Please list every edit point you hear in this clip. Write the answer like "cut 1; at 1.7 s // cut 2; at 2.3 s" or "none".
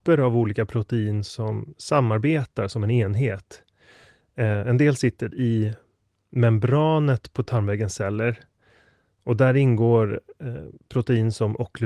none